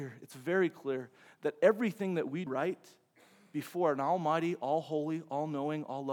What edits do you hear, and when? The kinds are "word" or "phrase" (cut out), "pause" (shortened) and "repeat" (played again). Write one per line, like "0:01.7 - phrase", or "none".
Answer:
0:02.5 - word